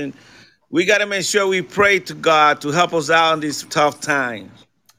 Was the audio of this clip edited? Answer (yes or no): yes